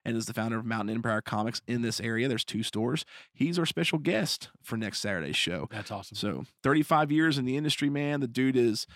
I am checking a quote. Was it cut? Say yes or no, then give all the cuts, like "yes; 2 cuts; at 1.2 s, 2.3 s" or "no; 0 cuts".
no; 0 cuts